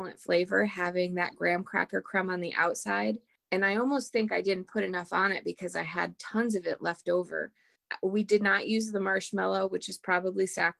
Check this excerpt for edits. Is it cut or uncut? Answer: uncut